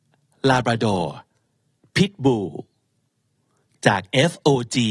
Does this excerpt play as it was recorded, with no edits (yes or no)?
yes